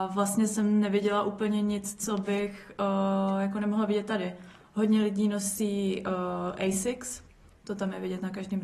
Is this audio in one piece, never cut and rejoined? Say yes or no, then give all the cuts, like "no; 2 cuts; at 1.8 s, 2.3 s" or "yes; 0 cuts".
yes; 0 cuts